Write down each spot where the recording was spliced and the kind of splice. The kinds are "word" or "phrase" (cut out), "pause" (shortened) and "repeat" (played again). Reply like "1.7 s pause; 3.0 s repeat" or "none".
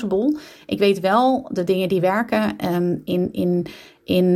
none